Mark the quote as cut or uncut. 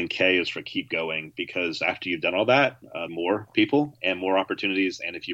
cut